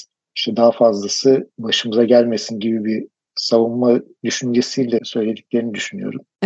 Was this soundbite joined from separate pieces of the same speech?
no; 0 cuts

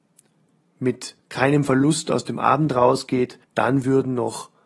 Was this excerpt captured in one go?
no; 2 cuts; at 1.2 s, 3.4 s

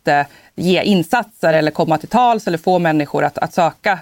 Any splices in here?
no; 0 cuts

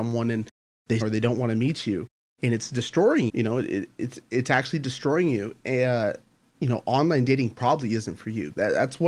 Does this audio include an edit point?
yes; 2 cuts; at 1.0 s, 3.3 s

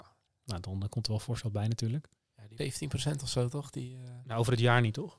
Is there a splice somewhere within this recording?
yes; 1 cut; at 2.6 s

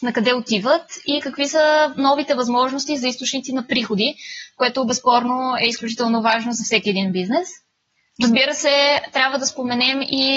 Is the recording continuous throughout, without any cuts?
yes; 0 cuts

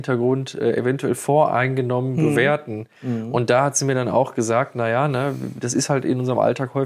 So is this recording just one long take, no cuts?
yes; 0 cuts

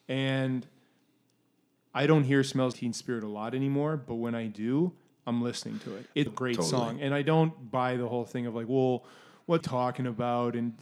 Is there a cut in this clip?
yes; 3 cuts; at 2.7 s, 6.3 s, 9.6 s

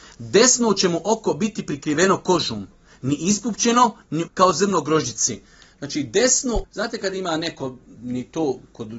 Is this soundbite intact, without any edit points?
no; 2 cuts; at 4.3 s, 6.6 s

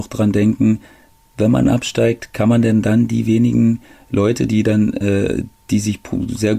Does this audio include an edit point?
no; 0 cuts

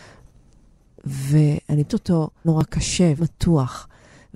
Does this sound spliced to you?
yes; 3 cuts; at 1.9 s, 2.4 s, 3.2 s

